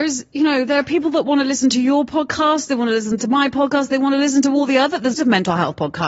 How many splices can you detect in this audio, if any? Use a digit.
1